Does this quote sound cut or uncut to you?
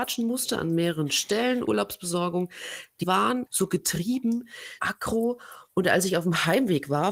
cut